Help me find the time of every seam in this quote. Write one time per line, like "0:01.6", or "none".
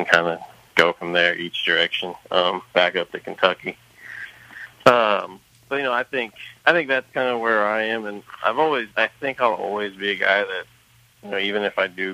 0:02.2
0:04.7
0:06.6
0:08.9